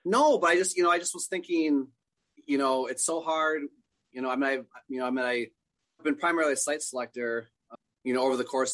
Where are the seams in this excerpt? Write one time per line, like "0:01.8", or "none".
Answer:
0:06.0